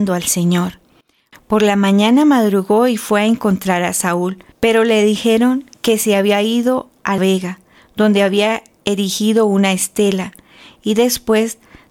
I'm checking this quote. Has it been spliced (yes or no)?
yes